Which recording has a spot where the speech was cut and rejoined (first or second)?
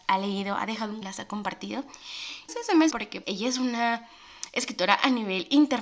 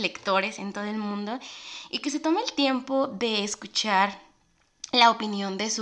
first